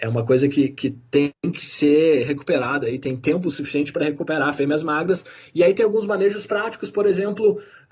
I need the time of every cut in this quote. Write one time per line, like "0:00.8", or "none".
none